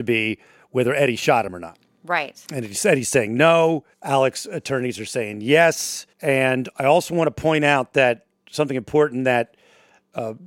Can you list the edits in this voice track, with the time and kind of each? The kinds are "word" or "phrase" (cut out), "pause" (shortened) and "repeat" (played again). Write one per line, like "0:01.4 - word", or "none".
0:02.4 - pause
0:03.9 - pause
0:06.1 - pause